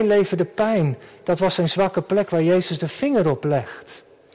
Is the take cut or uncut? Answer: uncut